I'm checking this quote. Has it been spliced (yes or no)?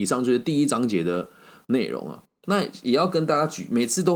no